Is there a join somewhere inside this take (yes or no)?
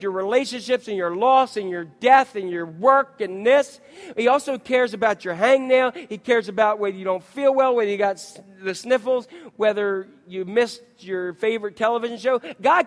no